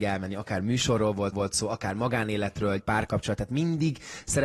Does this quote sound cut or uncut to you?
cut